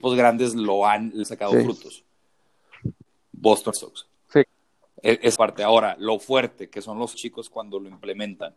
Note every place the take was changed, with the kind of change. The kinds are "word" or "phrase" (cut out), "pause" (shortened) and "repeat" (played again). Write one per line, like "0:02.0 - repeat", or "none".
0:01.2 - word
0:03.7 - word
0:04.2 - pause
0:05.4 - phrase
0:07.1 - word